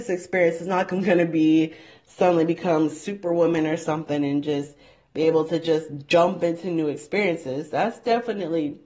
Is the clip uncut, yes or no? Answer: yes